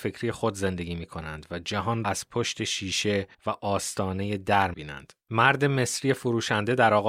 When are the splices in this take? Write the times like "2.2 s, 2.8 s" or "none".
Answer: 2.0 s, 3.3 s, 4.7 s

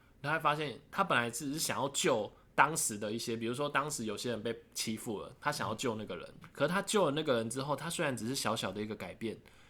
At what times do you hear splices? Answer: 6.4 s

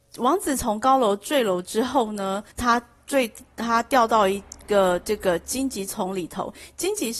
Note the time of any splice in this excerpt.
2.5 s

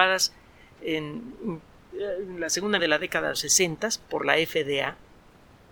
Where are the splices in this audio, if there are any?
2.8 s, 3.3 s

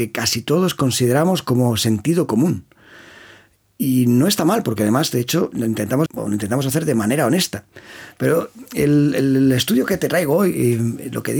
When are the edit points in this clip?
6.1 s

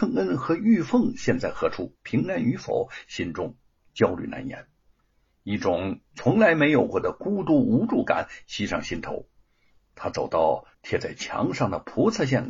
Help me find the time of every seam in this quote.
2.0 s, 6.1 s, 10.7 s

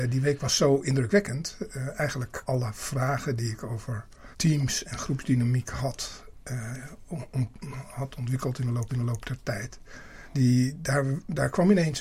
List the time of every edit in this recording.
2.5 s, 4.3 s, 8.9 s, 10.3 s

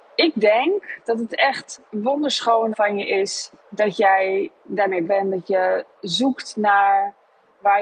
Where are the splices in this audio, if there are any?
1.9 s, 2.7 s, 3.6 s, 5.0 s

